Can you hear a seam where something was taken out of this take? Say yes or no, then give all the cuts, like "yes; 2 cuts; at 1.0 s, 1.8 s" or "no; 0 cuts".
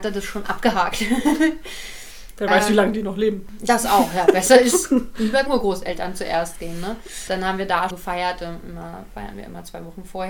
yes; 2 cuts; at 5.5 s, 7.9 s